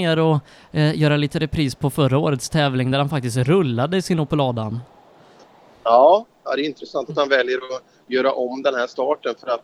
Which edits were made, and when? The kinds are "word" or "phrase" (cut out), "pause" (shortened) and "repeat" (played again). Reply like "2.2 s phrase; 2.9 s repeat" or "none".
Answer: none

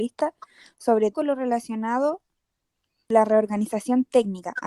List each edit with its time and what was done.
1.1 s word; 3.1 s word

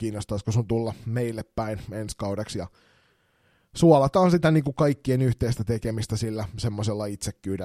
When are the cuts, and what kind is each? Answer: none

